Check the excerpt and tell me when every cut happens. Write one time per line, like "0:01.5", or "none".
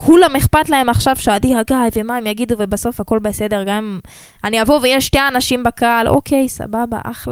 none